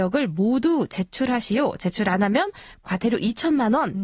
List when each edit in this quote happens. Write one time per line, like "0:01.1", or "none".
none